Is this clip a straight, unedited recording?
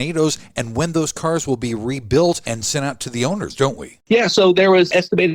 yes; 0 cuts

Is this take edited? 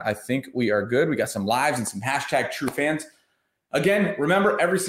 no; 0 cuts

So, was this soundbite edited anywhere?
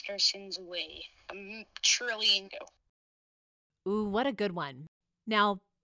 yes; 2 cuts; at 1.3 s, 2.5 s

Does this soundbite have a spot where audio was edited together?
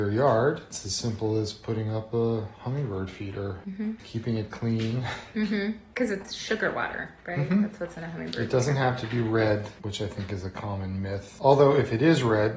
no; 0 cuts

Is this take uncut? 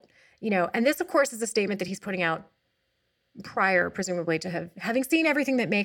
yes; 0 cuts

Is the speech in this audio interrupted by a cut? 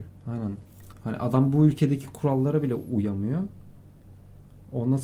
no; 0 cuts

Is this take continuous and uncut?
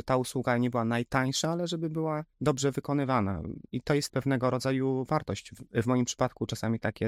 no; 2 cuts; at 2.3 s, 4.1 s

